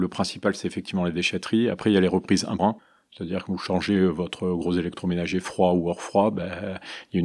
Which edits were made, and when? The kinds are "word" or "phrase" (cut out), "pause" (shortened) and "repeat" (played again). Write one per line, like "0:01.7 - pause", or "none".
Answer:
0:02.6 - word